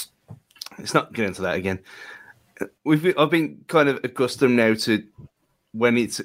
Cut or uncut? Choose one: cut